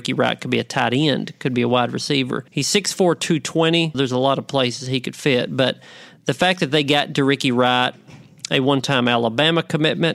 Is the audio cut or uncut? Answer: cut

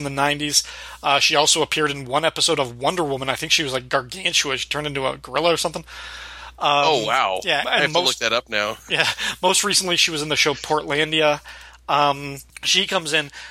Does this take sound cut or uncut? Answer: cut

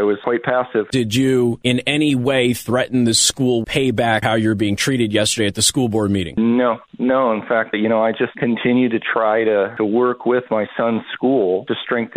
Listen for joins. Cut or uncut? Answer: cut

